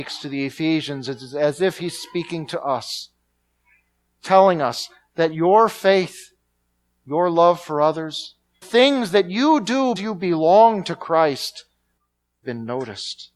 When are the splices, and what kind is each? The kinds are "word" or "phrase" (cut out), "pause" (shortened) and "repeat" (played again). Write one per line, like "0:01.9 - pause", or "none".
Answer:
0:08.6 - word
0:10.0 - word
0:12.4 - word